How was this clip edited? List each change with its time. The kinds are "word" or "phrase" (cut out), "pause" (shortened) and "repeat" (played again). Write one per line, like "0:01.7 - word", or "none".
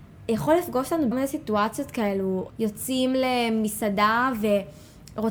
0:01.1 - word
0:02.5 - phrase